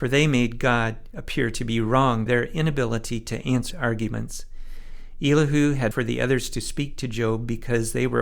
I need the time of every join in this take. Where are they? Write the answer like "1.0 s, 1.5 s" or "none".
2.3 s, 3.7 s, 5.9 s